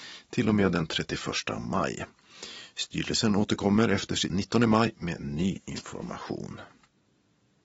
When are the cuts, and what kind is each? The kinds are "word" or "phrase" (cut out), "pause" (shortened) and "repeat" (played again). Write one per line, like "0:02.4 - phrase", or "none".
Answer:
0:04.3 - phrase